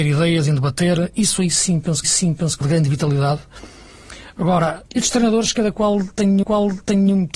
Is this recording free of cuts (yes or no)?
no